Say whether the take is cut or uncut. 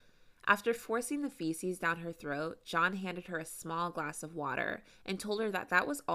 uncut